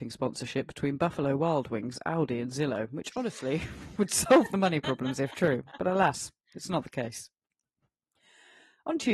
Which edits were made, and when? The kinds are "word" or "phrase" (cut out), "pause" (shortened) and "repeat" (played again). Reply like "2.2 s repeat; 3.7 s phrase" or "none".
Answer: none

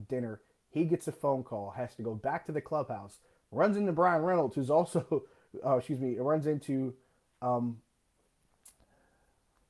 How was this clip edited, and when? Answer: none

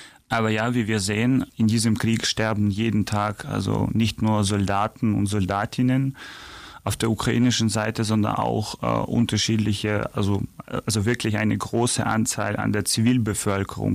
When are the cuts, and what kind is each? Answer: none

